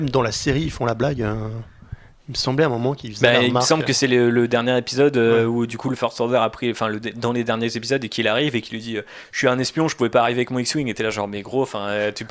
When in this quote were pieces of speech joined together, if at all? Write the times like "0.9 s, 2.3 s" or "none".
none

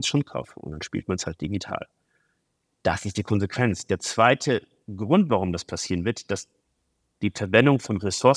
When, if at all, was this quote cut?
none

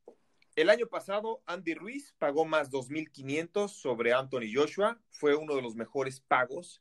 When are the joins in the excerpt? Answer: 5.1 s

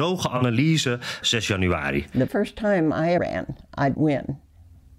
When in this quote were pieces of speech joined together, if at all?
1.2 s, 2.3 s, 3.2 s, 3.9 s

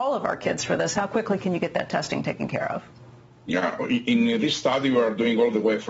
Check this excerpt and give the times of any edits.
none

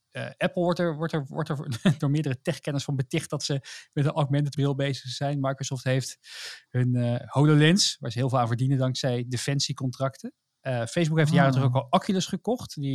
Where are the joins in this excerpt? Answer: 4.5 s

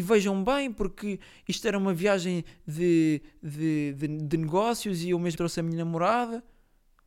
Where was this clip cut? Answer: 5.4 s

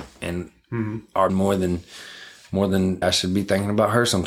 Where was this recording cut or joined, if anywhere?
1.3 s, 3.0 s

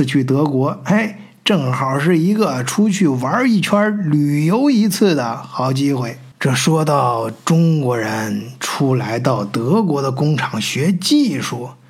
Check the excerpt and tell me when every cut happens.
6.3 s

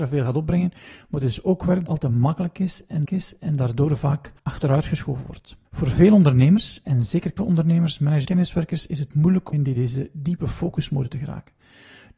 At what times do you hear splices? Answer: 1.9 s, 3.0 s, 4.4 s, 5.6 s, 7.4 s, 8.2 s, 9.5 s

